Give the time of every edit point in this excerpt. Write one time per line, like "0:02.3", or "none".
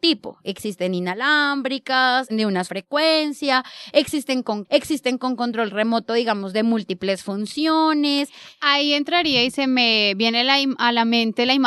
0:02.3
0:02.6
0:04.6